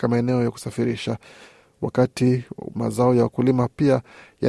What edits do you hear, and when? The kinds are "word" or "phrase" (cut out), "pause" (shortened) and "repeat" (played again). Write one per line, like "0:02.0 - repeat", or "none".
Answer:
none